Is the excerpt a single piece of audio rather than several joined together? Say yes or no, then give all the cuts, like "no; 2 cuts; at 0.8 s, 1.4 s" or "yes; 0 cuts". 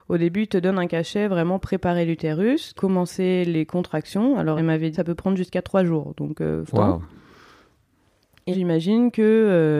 no; 6 cuts; at 1.6 s, 2.8 s, 4.6 s, 4.9 s, 6.7 s, 8.5 s